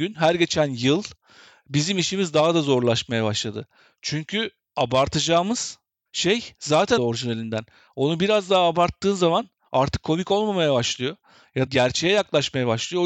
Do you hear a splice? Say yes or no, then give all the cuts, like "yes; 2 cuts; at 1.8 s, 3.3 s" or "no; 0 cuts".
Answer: yes; 2 cuts; at 7.0 s, 11.7 s